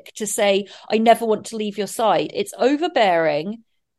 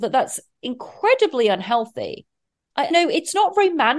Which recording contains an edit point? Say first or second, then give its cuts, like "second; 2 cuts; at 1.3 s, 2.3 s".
second; 1 cut; at 2.9 s